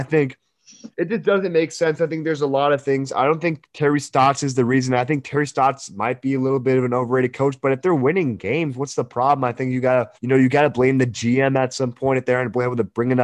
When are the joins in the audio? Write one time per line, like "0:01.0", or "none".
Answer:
0:00.9
0:10.1